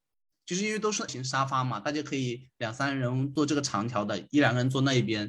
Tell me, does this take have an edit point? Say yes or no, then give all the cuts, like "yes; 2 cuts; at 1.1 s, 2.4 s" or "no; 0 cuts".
yes; 1 cut; at 1.1 s